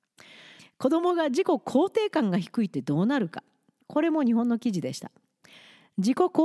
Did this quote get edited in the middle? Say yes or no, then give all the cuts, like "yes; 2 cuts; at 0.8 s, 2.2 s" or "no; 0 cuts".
no; 0 cuts